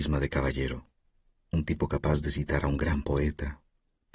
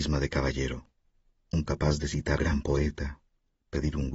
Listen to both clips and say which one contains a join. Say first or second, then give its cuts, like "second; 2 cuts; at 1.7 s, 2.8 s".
second; 2 cuts; at 1.7 s, 2.4 s